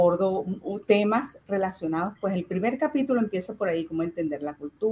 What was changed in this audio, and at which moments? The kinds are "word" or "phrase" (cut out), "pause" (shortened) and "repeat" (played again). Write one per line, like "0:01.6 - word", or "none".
none